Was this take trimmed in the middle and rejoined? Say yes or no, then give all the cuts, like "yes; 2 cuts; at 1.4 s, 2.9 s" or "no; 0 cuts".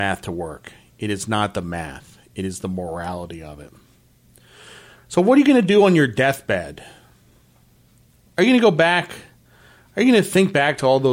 no; 0 cuts